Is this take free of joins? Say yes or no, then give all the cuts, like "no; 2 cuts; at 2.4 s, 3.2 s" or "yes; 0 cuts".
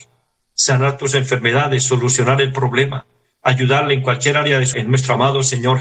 no; 1 cut; at 4.7 s